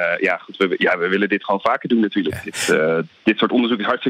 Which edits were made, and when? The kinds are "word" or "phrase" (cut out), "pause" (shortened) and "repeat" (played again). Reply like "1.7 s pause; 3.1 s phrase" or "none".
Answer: none